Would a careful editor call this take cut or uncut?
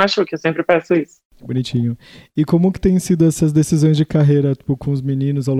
uncut